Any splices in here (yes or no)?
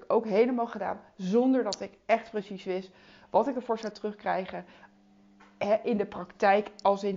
no